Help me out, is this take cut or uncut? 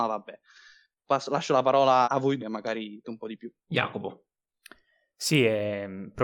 cut